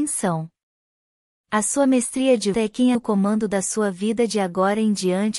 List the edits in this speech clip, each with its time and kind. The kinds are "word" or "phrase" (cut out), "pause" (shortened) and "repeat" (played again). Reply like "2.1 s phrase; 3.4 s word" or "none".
2.5 s word; 2.9 s word